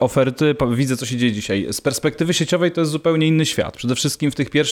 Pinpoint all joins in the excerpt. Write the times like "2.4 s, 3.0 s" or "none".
none